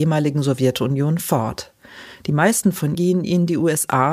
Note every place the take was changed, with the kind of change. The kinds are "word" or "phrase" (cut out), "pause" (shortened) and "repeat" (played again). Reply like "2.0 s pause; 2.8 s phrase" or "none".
2.9 s word